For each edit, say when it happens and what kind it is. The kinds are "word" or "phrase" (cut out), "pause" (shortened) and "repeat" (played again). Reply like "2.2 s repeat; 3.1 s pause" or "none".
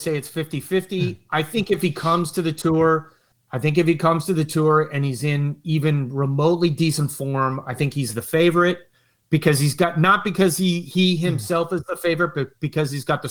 3.3 s pause